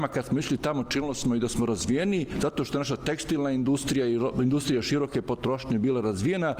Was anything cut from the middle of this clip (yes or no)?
no